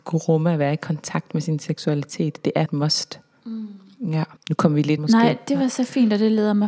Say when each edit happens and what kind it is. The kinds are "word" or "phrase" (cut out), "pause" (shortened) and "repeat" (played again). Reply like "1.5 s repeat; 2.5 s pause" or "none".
2.7 s word; 4.4 s pause; 5.0 s phrase